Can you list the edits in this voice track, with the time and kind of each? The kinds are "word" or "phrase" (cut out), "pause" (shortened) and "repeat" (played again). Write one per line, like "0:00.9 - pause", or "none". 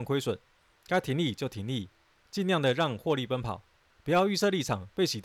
none